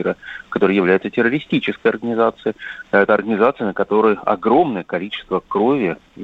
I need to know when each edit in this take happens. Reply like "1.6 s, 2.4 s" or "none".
none

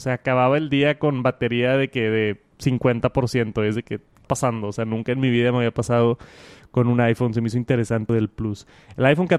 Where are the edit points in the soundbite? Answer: 4.2 s, 8.1 s

